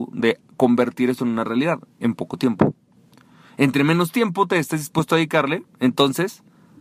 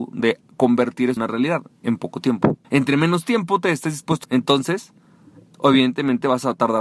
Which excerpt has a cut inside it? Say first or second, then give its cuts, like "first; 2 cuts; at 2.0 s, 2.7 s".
second; 3 cuts; at 1.2 s, 2.6 s, 4.2 s